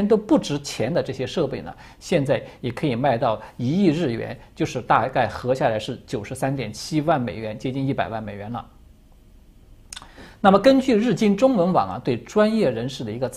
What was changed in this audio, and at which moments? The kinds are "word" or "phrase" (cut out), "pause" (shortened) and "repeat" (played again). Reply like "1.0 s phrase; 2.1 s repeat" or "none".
none